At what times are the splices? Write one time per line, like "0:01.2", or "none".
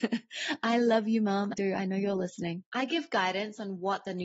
0:01.5
0:02.7